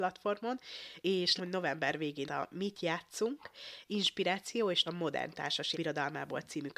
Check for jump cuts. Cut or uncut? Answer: cut